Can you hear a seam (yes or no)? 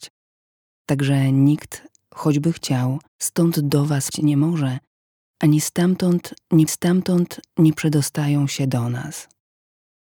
yes